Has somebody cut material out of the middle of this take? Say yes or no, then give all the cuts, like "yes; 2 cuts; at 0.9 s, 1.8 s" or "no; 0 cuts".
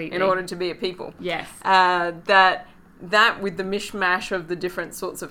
no; 0 cuts